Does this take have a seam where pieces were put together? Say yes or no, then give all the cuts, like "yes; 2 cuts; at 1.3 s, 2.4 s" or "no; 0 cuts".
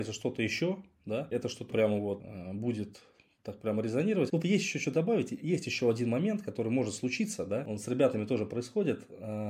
yes; 3 cuts; at 1.3 s, 1.7 s, 4.4 s